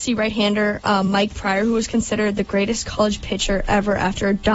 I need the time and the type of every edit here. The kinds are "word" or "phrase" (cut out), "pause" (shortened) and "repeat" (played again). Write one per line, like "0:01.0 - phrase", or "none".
none